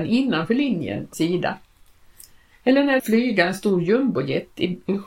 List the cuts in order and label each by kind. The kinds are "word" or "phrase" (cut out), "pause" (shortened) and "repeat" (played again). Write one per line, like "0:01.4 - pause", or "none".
0:01.1 - word
0:03.0 - phrase